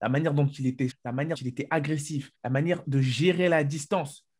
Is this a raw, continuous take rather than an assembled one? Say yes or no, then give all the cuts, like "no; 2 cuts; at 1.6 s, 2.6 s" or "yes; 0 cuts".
no; 4 cuts; at 0.9 s, 1.3 s, 2.3 s, 2.8 s